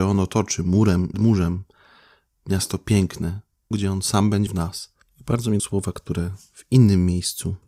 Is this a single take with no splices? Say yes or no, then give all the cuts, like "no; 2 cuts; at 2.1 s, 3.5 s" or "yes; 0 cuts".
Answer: no; 4 cuts; at 1.1 s, 3.7 s, 4.5 s, 5.6 s